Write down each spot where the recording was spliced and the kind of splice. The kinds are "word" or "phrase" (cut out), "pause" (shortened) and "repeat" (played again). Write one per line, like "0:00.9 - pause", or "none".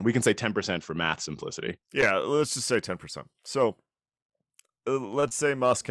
0:01.8 - pause